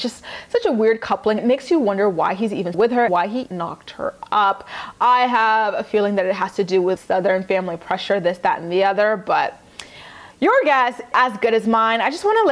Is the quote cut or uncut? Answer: cut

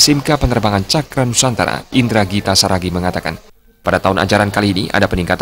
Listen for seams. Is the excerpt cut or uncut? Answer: uncut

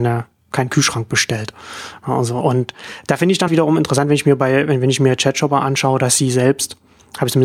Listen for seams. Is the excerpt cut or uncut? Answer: cut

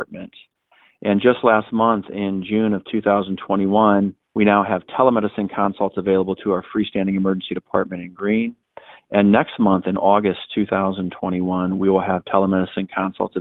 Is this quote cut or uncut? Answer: cut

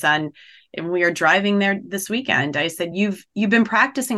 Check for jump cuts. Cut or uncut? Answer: uncut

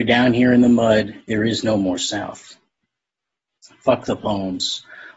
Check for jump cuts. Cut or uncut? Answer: uncut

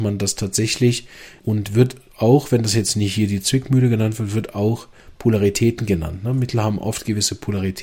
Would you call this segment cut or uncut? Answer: cut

